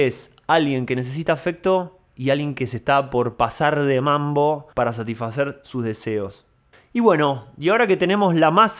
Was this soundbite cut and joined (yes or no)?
yes